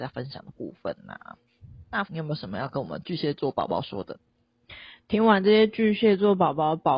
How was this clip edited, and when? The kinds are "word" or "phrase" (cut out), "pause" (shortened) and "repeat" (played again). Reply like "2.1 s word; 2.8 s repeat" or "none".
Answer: 2.1 s word